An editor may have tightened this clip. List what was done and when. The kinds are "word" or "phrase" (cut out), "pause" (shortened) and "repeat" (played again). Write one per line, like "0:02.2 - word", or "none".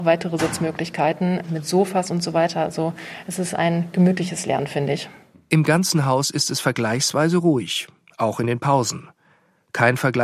none